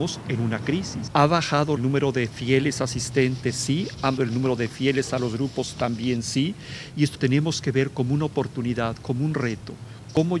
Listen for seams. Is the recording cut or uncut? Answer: cut